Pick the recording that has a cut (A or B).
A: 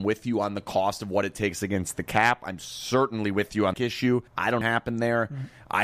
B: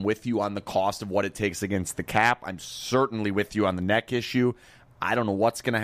A